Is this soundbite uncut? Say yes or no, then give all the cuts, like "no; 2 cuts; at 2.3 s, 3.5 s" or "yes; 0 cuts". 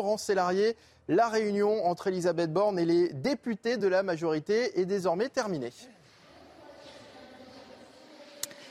yes; 0 cuts